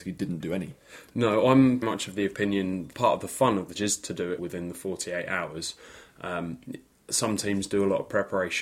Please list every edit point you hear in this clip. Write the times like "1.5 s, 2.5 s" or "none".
1.8 s, 2.9 s, 3.7 s, 4.4 s